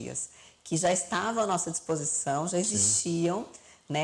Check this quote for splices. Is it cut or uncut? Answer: uncut